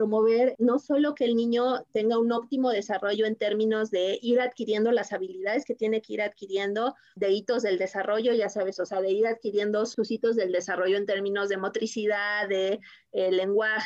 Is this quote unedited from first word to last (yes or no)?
yes